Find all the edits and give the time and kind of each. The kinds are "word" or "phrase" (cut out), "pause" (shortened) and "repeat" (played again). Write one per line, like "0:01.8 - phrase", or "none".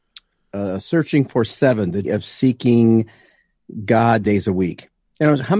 0:02.0 - word
0:04.2 - word